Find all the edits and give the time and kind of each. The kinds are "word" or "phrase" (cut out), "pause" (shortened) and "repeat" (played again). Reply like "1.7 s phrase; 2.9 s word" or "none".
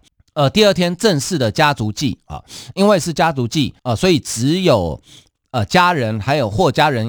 3.8 s pause

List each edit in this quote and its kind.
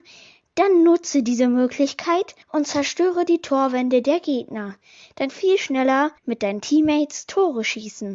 2.4 s pause; 5.3 s phrase; 6.2 s pause

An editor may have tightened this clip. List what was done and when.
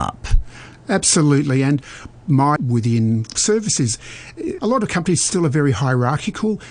2.6 s word; 3.4 s word; 4.6 s word

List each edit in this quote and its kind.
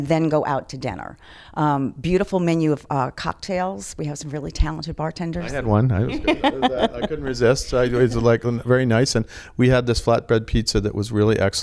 none

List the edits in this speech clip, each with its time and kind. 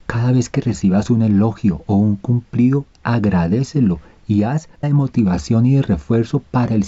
4.8 s phrase

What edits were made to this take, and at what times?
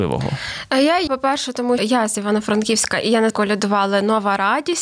1.1 s word; 1.8 s word; 3.3 s phrase

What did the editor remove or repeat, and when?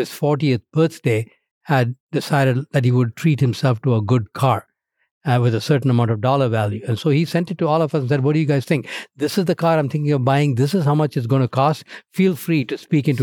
none

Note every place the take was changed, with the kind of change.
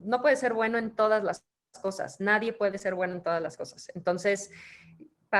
none

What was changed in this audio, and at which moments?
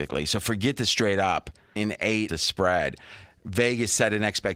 1.8 s word; 2.3 s word

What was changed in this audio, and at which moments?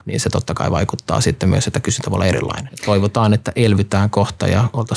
none

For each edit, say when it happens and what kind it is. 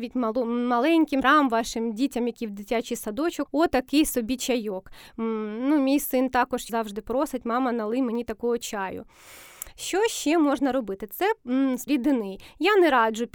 1.2 s word; 3.5 s word; 6.7 s word; 11.9 s word

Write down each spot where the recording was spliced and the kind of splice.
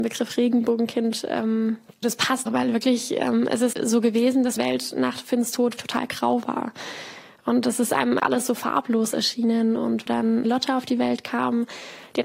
2.0 s word; 2.5 s word; 3.7 s word; 4.6 s word; 5.8 s word; 8.2 s word; 10.1 s word; 10.4 s word

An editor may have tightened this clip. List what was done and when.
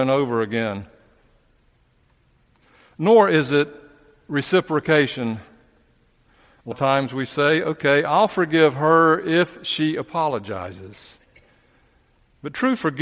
6.7 s word

